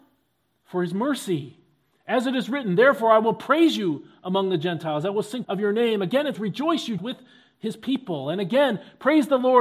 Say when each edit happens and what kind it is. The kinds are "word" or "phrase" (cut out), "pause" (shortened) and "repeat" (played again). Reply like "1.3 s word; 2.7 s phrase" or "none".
5.4 s word; 6.3 s word; 7.0 s word